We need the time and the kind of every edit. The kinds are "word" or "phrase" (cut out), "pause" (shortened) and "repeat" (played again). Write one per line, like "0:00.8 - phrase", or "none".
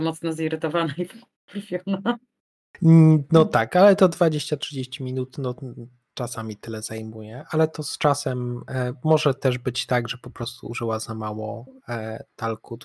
none